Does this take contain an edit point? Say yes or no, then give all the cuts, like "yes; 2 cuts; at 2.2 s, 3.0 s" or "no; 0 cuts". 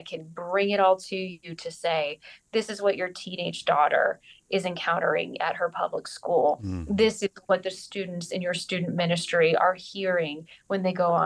no; 0 cuts